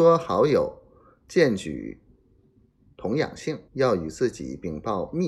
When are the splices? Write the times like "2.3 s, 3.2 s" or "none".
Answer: 3.7 s